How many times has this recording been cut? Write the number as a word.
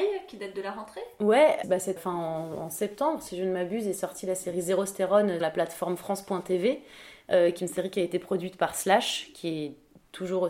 four